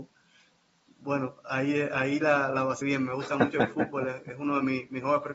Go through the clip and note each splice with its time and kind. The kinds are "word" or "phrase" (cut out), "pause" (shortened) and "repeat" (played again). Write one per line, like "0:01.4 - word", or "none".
0:02.8 - word